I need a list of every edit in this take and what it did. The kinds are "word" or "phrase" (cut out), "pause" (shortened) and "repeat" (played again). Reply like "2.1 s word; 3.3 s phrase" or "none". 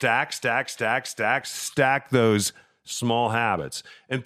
1.4 s word